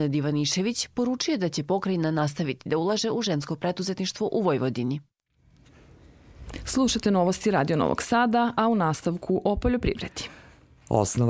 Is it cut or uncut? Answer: uncut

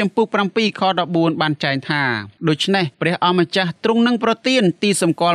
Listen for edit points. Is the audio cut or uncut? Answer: cut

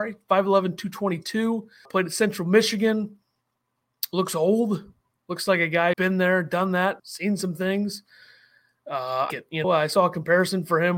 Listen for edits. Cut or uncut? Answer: cut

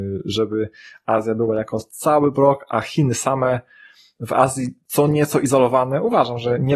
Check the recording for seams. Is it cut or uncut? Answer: uncut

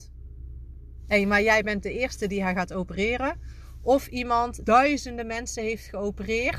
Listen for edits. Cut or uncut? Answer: cut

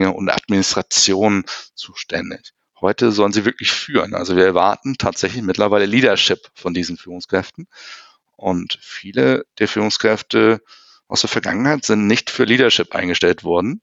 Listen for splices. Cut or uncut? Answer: uncut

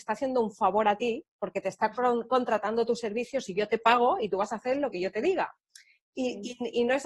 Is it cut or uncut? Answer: uncut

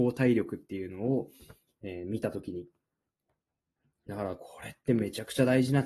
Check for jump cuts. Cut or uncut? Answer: uncut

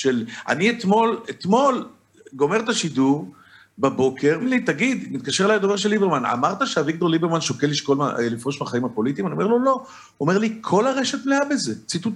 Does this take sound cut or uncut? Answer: cut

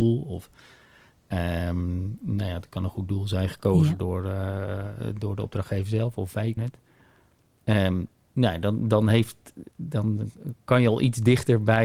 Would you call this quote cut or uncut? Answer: cut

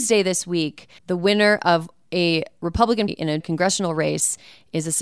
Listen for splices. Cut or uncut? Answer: cut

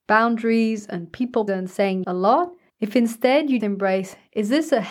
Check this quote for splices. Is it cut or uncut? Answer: cut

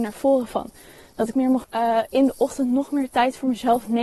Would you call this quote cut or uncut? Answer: cut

